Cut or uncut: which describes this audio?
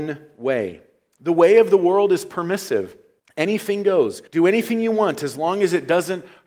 cut